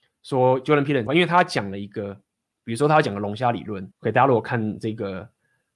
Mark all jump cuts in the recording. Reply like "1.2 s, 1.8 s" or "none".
1.1 s, 2.5 s, 3.9 s